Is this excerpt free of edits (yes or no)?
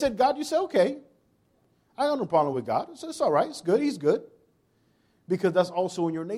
yes